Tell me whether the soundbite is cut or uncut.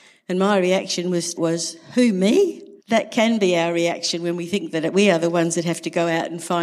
cut